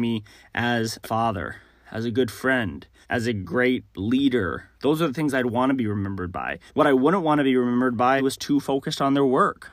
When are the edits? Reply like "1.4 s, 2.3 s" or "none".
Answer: 1.0 s, 3.0 s, 4.7 s, 6.7 s, 8.2 s